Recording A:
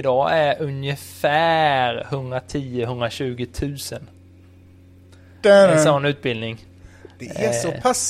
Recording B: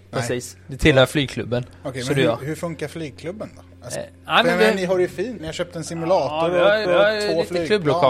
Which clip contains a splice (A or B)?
B